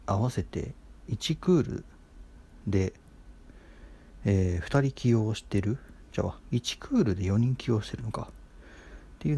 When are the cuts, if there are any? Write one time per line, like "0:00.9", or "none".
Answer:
0:01.1